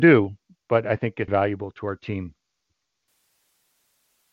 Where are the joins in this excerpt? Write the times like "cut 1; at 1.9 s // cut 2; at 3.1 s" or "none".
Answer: cut 1; at 1.3 s